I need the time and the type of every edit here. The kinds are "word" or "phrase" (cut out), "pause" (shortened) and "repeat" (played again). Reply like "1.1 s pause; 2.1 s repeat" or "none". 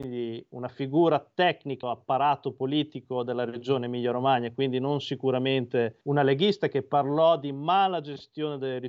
1.8 s phrase; 6.0 s pause